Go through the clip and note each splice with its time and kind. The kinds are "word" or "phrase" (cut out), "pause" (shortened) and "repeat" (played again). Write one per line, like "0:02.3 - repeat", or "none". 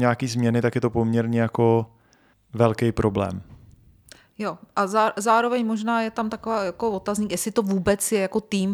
0:02.3 - pause